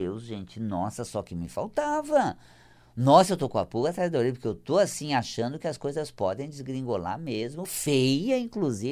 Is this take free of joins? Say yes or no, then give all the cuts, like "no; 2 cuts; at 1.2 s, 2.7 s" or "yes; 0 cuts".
yes; 0 cuts